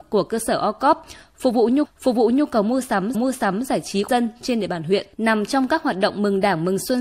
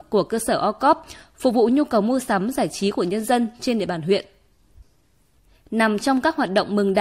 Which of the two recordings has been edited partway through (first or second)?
first